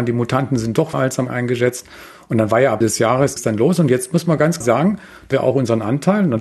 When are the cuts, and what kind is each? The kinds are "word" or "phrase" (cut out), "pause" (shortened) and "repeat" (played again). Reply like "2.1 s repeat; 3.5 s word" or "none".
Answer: 0.9 s word; 1.3 s word; 2.8 s word; 3.4 s word; 4.6 s word; 5.3 s word